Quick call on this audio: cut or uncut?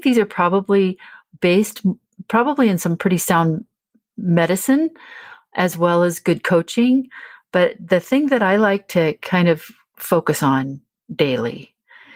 uncut